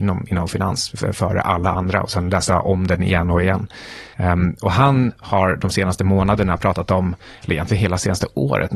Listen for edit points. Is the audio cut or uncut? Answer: uncut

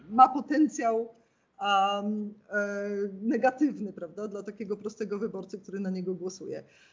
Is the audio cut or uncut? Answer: uncut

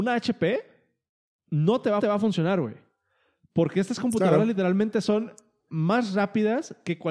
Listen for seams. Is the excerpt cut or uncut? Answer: cut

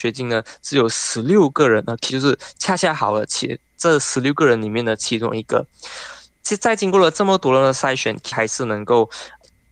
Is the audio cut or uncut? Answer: cut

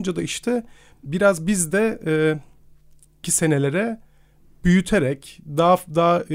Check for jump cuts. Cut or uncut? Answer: cut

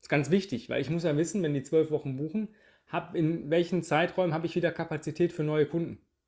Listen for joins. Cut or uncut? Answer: uncut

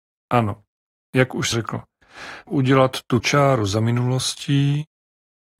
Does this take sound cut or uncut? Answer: cut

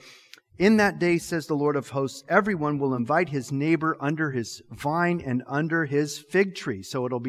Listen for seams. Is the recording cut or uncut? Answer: uncut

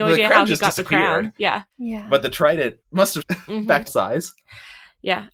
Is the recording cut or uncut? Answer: cut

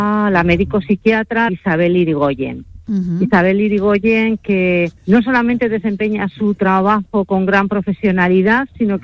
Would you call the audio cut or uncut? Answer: cut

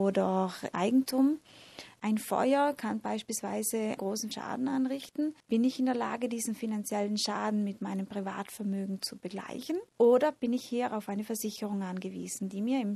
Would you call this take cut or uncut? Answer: cut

